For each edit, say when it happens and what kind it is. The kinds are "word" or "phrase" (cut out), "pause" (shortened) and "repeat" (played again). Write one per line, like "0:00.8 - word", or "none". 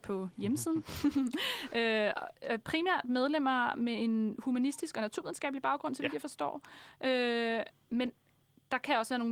none